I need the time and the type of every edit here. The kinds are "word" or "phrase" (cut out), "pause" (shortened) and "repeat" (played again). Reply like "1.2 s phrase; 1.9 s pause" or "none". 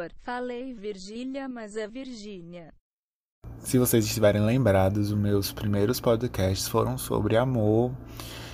none